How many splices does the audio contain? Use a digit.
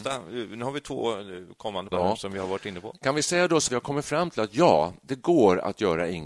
2